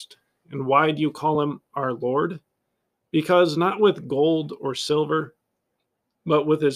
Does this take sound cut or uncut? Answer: uncut